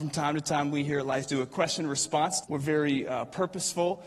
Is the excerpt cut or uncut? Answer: cut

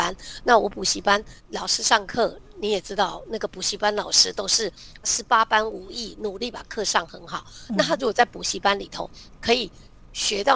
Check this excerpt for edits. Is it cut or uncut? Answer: cut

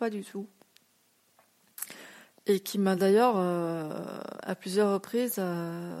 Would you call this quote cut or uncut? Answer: uncut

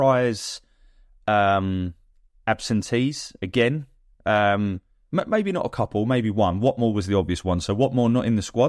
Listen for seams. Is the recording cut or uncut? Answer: uncut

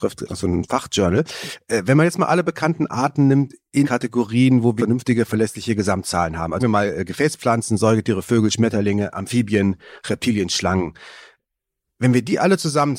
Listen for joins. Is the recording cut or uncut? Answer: cut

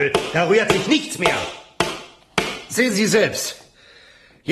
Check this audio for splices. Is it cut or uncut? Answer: uncut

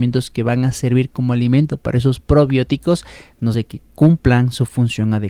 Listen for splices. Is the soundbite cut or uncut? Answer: cut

